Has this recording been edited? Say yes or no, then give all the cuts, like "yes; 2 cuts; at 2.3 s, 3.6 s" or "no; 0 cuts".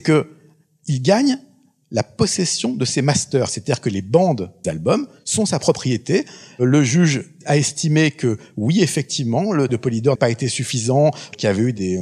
yes; 3 cuts; at 4.6 s, 9.7 s, 10.1 s